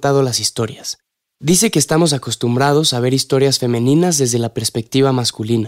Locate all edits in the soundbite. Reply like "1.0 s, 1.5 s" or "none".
none

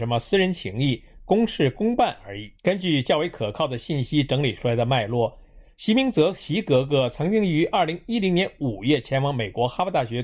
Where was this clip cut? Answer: 2.5 s

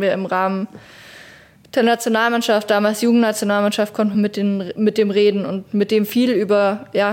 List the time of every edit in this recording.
none

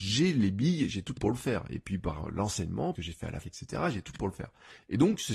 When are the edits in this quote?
1.2 s, 2.9 s, 3.4 s, 4.2 s

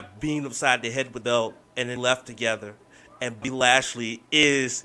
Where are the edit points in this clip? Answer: 1.2 s, 1.6 s, 2.0 s, 3.4 s

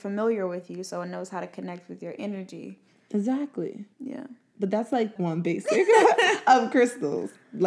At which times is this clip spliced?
3.9 s, 5.2 s

